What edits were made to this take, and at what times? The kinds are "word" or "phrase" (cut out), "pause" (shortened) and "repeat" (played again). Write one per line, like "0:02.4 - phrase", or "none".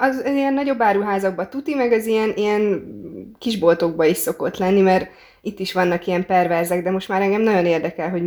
none